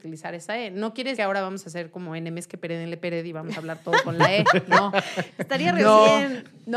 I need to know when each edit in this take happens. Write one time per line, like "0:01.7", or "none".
0:01.1